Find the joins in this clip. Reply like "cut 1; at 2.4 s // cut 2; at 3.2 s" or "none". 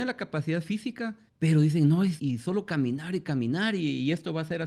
cut 1; at 1.3 s // cut 2; at 2.2 s